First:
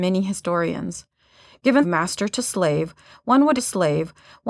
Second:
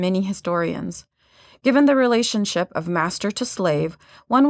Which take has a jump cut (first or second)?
first